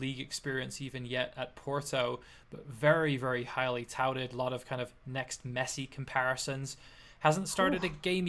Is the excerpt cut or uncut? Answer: uncut